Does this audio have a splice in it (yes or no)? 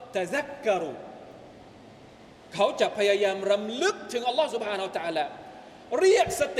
no